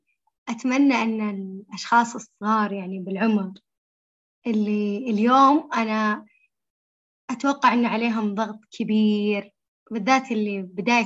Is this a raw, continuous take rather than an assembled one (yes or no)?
yes